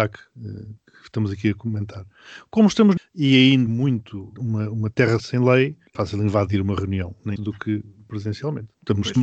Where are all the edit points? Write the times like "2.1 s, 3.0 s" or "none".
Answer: 3.0 s, 3.7 s, 4.4 s, 5.2 s, 5.9 s, 7.4 s